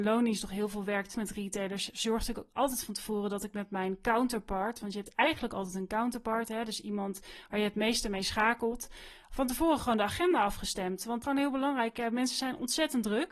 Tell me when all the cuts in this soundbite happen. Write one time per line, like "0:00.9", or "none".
0:01.1
0:11.2